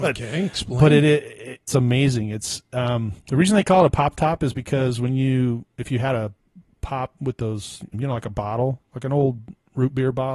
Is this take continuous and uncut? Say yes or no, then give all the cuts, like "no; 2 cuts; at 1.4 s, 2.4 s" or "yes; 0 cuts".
no; 2 cuts; at 1.7 s, 7.9 s